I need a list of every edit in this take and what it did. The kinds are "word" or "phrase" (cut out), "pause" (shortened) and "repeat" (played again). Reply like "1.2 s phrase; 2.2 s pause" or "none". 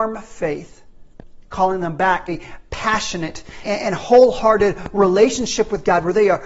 2.3 s word; 3.6 s word